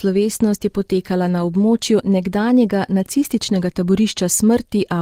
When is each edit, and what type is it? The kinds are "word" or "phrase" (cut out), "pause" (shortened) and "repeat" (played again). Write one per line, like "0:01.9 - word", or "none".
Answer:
none